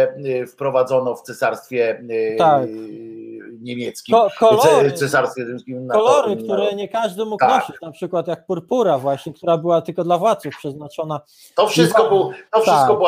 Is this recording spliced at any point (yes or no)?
no